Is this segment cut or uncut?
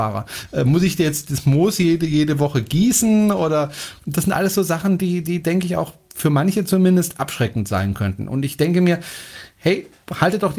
uncut